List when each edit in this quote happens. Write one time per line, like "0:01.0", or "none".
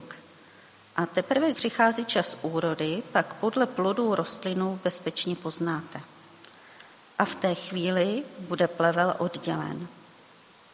0:01.5